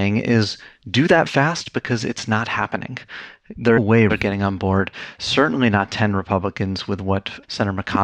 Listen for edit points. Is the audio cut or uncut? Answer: cut